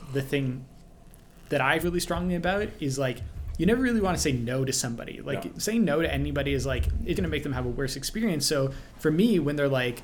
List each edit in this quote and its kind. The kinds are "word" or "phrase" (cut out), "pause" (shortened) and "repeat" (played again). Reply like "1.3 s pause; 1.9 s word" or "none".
1.8 s word; 7.1 s word